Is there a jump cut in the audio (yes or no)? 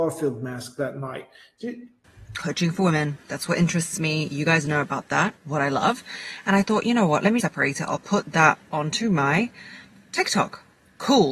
yes